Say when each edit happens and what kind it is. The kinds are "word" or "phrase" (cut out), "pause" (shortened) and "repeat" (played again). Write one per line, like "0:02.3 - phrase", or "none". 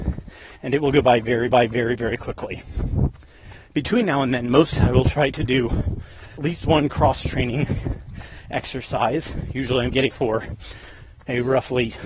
0:01.5 - repeat
0:04.7 - word
0:06.4 - word
0:10.1 - word